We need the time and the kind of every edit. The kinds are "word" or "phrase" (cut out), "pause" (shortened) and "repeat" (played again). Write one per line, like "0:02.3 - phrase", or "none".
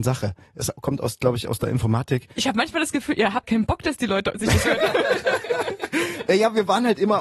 0:02.3 - pause
0:03.4 - word
0:04.6 - word